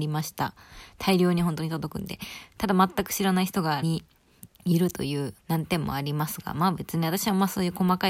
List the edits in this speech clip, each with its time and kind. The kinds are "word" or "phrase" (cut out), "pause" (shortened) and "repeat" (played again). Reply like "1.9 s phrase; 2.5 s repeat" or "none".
3.8 s word; 4.5 s pause; 5.4 s pause